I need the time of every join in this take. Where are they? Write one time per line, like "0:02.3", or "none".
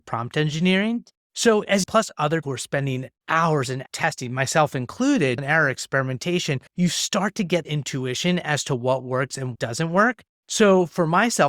0:01.8
0:02.4
0:03.2
0:03.9
0:05.4
0:06.7
0:07.6
0:09.5